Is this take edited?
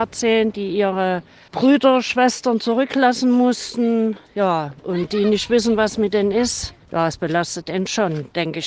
no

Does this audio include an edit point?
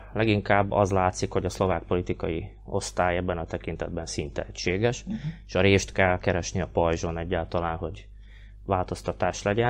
no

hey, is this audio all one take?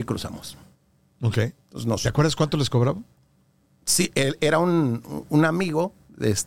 yes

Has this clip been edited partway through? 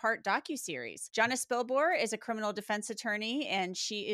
no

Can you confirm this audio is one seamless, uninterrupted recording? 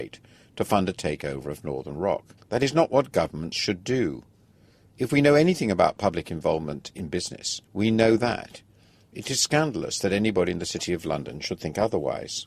no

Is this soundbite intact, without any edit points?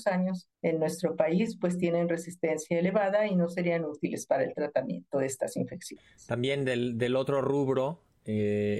yes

